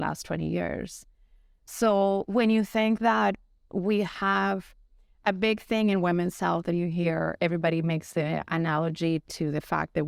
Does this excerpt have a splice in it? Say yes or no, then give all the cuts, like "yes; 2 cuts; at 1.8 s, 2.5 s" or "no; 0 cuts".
no; 0 cuts